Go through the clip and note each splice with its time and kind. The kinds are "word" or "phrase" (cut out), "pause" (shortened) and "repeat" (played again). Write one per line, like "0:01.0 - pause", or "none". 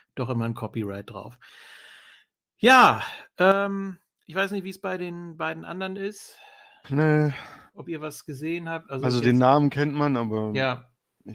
none

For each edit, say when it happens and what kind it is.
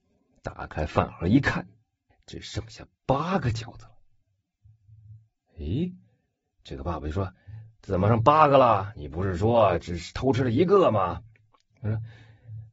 0:02.1 - word

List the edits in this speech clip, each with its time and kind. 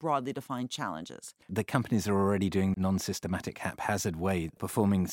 0:01.4 - pause
0:02.7 - phrase

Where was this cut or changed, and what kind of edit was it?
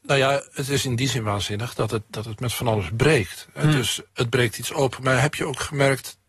0:04.1 - word

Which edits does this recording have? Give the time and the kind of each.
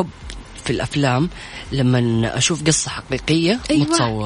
none

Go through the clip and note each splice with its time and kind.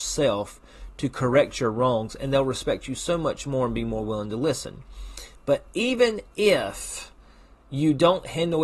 none

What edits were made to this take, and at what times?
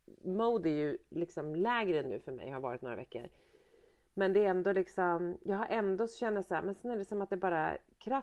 none

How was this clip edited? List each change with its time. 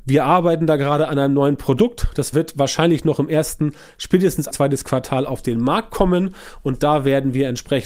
0:02.3 - word
0:04.5 - word

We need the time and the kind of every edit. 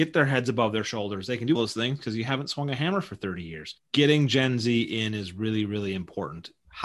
0:01.6 - word

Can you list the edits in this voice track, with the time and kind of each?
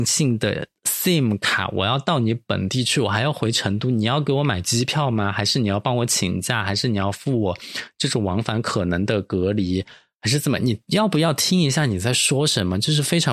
none

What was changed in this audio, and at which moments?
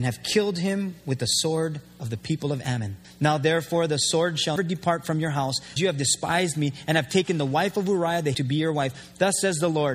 0:03.0 - pause
0:04.6 - word
0:05.8 - word
0:08.3 - word

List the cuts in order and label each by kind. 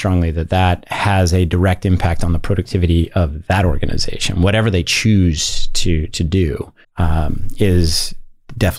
0:06.8 - pause

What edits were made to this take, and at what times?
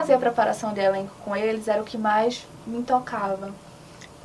none

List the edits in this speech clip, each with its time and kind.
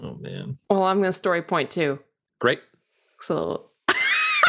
none

